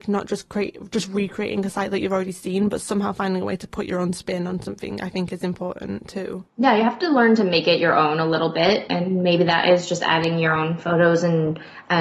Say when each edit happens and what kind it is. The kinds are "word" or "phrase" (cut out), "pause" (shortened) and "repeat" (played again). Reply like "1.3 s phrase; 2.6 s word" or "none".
8.9 s word